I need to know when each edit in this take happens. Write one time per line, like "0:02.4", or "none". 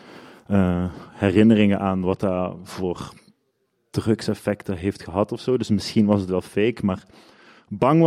none